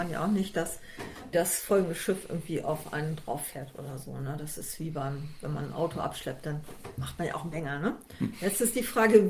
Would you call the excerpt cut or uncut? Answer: cut